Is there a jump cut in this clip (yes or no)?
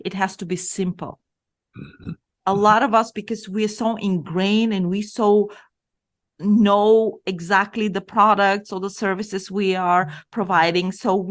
no